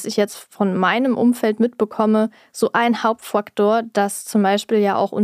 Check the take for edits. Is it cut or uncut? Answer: uncut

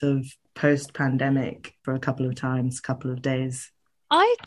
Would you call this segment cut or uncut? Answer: cut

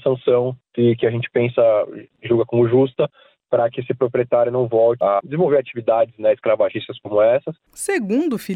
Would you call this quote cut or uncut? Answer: uncut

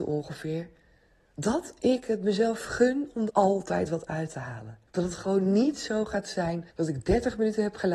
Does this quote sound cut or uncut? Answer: cut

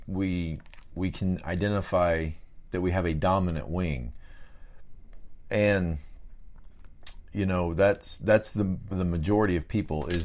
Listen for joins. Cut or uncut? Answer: cut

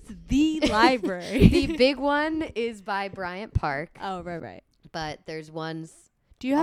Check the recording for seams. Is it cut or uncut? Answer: cut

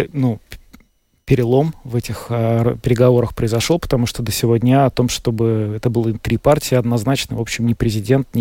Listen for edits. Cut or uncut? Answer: uncut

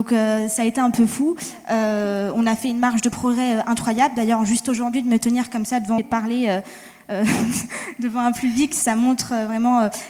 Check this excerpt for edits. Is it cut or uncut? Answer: cut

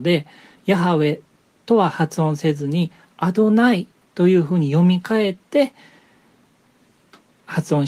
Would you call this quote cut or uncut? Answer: uncut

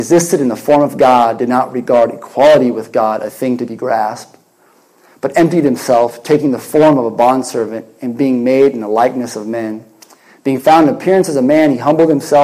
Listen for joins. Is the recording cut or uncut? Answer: uncut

